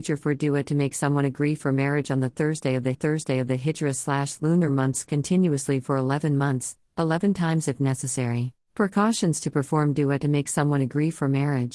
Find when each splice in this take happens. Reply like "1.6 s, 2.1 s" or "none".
2.9 s, 8.6 s

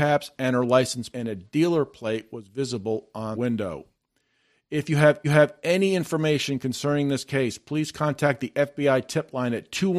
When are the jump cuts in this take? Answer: 1.1 s, 3.3 s, 5.2 s

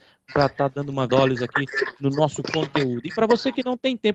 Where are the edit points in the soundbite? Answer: 1.1 s

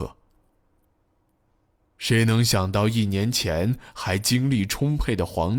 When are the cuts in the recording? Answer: none

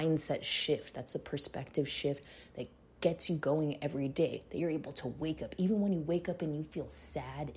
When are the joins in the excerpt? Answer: none

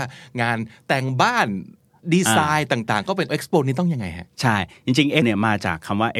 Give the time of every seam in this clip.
3.3 s, 5.2 s

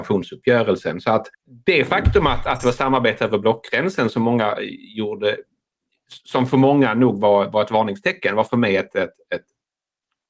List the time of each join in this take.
1.3 s

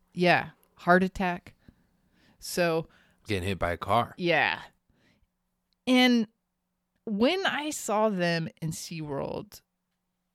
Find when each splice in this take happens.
3.3 s, 8.6 s

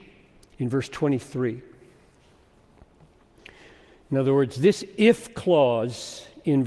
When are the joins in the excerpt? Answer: none

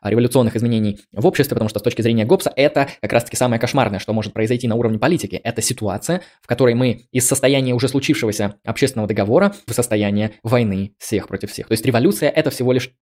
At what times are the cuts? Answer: 9.7 s

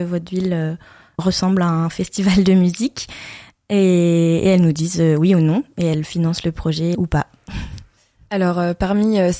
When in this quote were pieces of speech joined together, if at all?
1.2 s, 6.9 s

